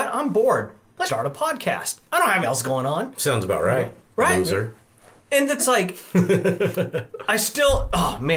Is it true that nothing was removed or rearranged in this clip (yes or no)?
no